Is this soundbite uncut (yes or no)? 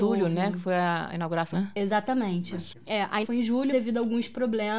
no